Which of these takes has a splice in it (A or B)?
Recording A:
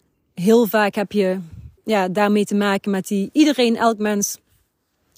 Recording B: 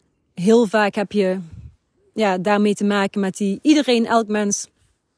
A